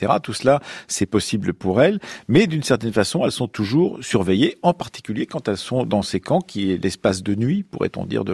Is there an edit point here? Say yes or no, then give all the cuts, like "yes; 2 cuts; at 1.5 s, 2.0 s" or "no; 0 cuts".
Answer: no; 0 cuts